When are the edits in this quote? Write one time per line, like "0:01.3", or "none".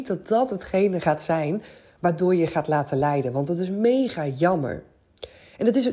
none